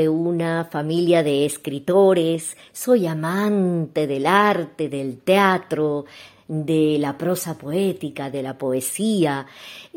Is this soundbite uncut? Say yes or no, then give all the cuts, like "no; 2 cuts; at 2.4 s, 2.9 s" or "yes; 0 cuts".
yes; 0 cuts